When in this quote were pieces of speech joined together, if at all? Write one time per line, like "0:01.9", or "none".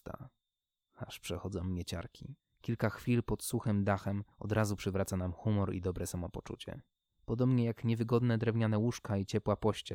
0:02.4
0:04.3
0:07.0